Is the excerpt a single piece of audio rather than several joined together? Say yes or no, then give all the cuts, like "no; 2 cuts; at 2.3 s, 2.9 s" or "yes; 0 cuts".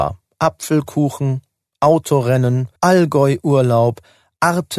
no; 1 cut; at 2.8 s